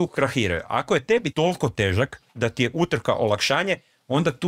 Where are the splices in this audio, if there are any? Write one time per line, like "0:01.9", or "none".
0:01.3
0:02.3